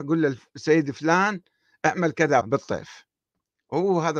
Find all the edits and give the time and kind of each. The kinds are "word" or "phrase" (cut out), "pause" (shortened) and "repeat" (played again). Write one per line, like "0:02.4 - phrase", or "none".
0:02.4 - word

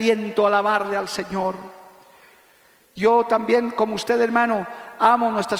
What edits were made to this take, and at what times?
none

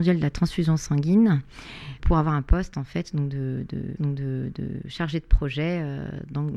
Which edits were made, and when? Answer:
0:02.0 - word
0:04.0 - repeat

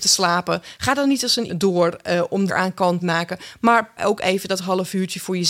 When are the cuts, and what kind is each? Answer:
0:01.5 - phrase
0:02.5 - phrase
0:03.0 - word
0:04.0 - word

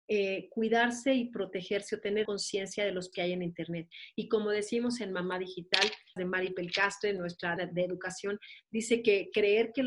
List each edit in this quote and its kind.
0:02.2 - word
0:03.1 - word
0:06.2 - word
0:07.6 - word

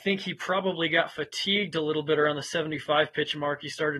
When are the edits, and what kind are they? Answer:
none

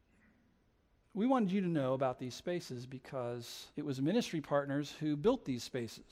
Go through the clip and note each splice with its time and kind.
0:03.7 - pause

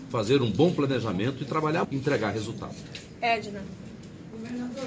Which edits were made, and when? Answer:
0:01.8 - word

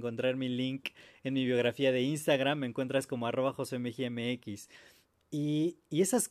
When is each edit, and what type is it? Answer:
none

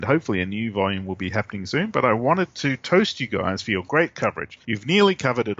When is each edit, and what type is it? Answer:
0:04.6 - pause

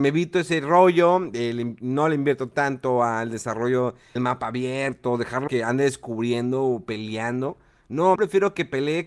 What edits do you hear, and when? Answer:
0:04.2 - word
0:05.5 - word
0:08.2 - word

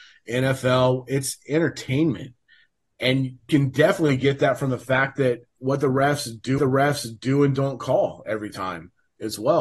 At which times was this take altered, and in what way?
0:03.5 - word
0:06.6 - repeat

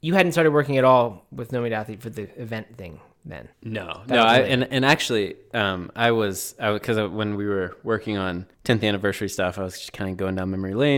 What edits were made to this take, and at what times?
0:03.5 - pause
0:08.5 - pause

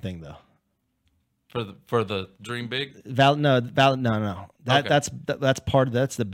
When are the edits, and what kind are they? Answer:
0:02.3 - pause
0:04.5 - pause

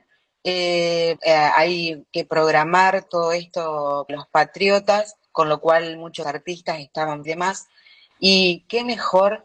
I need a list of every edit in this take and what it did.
0:01.2 - word
0:03.1 - word
0:04.1 - word
0:05.2 - pause
0:06.2 - phrase
0:07.2 - phrase

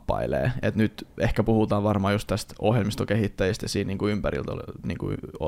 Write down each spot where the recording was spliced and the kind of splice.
none

